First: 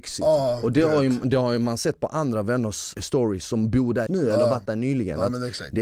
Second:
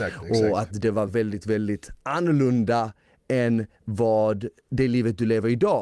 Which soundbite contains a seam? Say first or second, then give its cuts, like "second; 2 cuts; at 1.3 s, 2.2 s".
first; 1 cut; at 4.1 s